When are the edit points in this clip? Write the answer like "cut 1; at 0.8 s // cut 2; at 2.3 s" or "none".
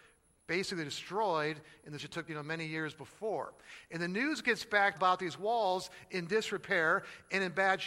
cut 1; at 2.0 s // cut 2; at 2.3 s // cut 3; at 4.9 s